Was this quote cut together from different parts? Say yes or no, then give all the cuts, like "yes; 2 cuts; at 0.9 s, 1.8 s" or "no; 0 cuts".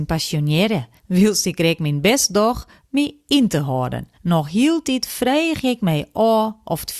yes; 2 cuts; at 1.0 s, 4.1 s